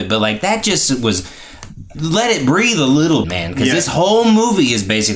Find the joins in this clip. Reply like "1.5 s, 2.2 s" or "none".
1.9 s, 3.2 s

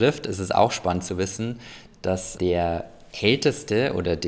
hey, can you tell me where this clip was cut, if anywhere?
2.4 s

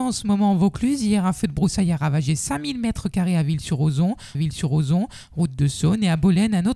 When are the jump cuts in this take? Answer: 4.3 s

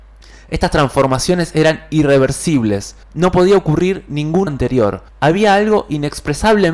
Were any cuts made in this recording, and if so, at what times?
3.0 s, 4.5 s, 5.1 s

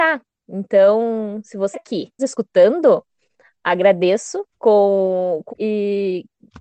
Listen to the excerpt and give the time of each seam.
1.7 s, 2.2 s, 4.5 s, 5.5 s

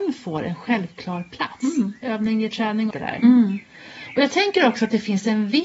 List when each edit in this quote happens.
2.9 s

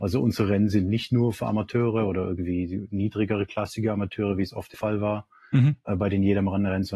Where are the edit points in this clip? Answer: 4.7 s

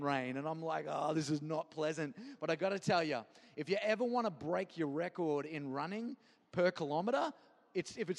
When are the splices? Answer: none

